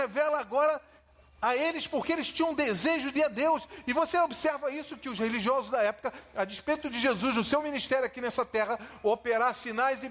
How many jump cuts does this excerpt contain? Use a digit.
1